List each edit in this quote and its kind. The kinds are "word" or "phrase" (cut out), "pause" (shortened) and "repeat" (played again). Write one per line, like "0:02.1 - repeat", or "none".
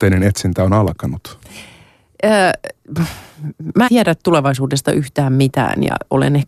0:03.9 - word